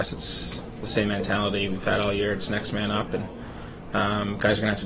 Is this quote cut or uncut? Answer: uncut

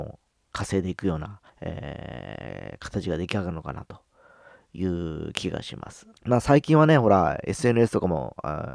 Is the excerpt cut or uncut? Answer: cut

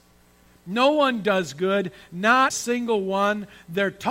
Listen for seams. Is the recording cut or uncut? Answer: cut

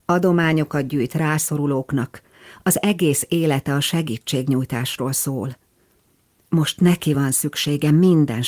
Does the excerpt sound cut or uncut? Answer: uncut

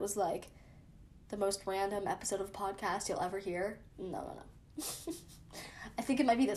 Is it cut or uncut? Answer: uncut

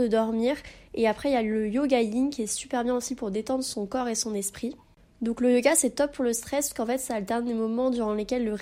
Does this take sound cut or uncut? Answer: uncut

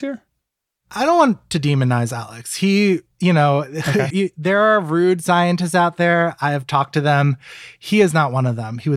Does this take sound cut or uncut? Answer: cut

